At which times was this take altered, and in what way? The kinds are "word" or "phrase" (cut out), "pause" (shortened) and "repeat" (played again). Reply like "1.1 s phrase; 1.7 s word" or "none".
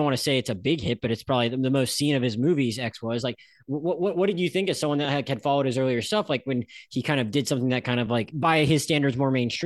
none